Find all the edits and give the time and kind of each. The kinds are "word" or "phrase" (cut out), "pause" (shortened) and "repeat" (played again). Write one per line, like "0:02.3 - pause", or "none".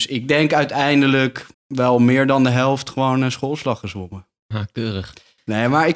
0:01.5 - pause